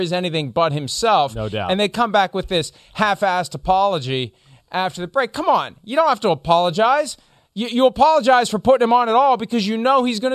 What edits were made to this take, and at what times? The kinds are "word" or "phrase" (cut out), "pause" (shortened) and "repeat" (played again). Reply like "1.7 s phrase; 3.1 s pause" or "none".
none